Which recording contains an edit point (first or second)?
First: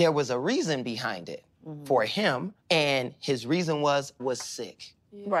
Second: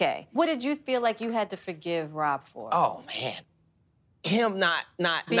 first